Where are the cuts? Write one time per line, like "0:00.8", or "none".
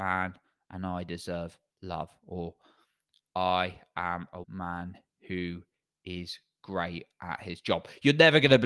0:04.4

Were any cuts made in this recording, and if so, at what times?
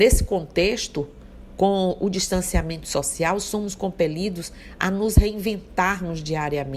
none

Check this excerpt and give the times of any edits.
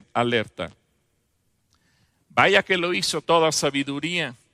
0:03.2

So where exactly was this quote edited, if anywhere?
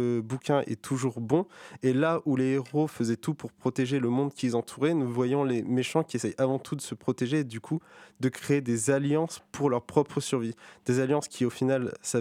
none

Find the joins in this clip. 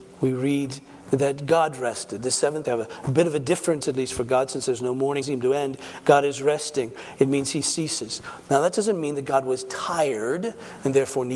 0:02.6
0:03.8
0:05.2

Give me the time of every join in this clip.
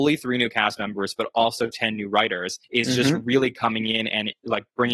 0:02.6

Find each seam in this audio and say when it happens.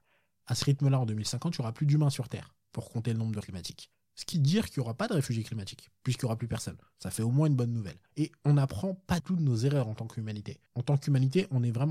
0:03.4
0:04.3
0:08.1
0:09.2
0:10.7

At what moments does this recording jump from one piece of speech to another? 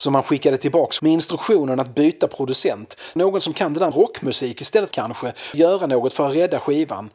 0:01.0
0:03.2
0:03.9
0:04.9
0:05.5

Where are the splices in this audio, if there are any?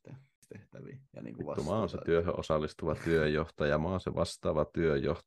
0:01.1

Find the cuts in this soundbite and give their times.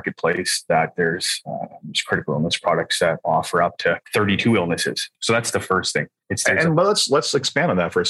0:04.0

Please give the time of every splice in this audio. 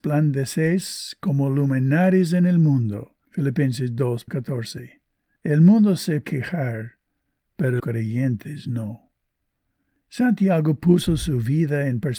0:04.3
0:06.2
0:07.8

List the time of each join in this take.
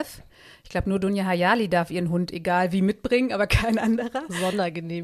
none

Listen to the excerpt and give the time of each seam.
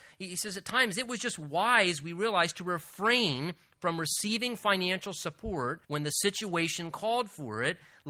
0:05.8

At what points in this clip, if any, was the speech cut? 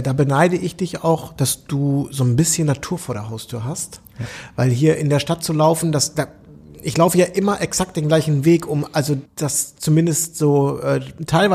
0:09.3

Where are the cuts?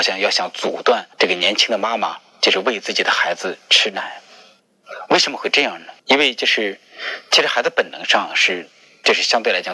0:01.1
0:06.0

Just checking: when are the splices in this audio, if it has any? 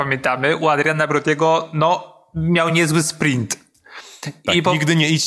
none

